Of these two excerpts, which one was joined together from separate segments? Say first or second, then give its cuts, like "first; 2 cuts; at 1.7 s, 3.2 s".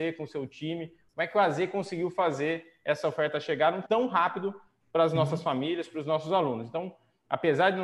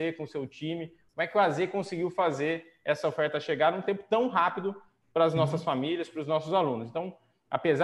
first; 1 cut; at 3.8 s